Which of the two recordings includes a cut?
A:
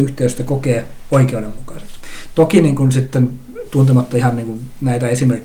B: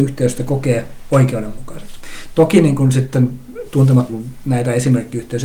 B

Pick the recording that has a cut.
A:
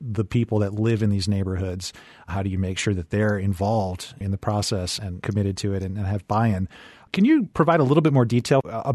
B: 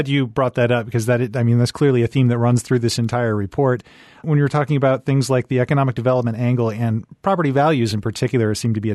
A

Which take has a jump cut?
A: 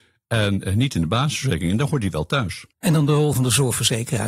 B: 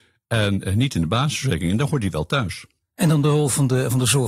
A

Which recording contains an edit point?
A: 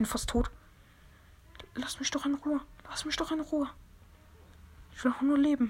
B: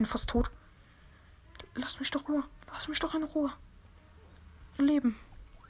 B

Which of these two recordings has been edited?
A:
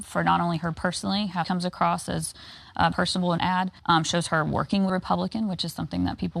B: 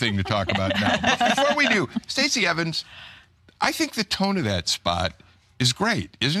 A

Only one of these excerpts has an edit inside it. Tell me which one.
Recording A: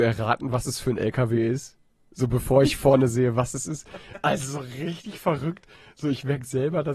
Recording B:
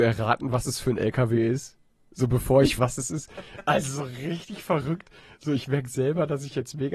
B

